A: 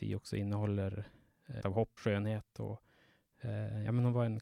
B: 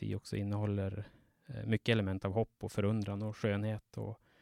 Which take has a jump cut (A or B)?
A